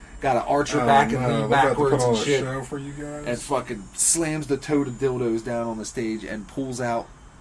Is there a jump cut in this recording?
no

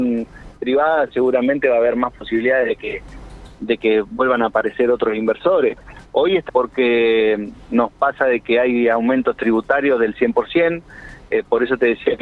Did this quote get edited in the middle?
yes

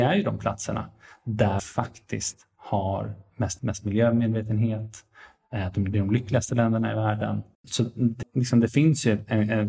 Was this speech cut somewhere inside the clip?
yes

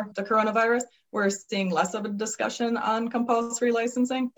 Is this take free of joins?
yes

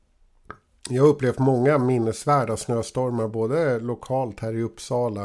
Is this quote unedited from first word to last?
yes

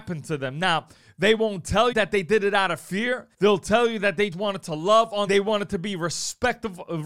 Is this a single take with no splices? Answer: no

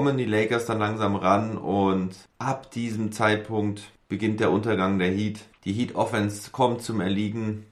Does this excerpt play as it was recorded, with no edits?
yes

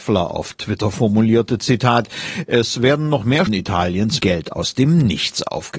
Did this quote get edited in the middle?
yes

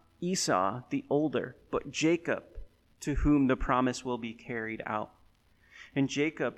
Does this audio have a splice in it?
no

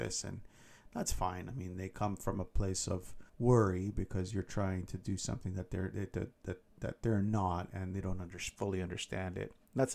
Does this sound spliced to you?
yes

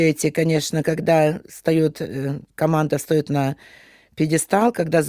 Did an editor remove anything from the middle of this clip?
yes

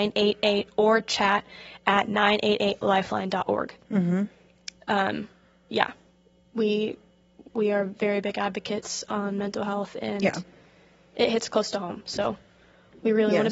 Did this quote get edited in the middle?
no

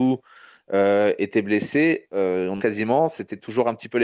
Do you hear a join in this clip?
yes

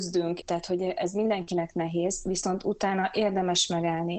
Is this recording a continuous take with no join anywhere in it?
yes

